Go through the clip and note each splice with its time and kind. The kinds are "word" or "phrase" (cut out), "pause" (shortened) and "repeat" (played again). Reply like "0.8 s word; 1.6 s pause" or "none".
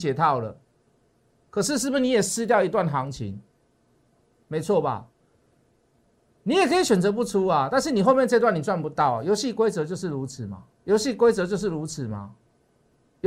10.7 s pause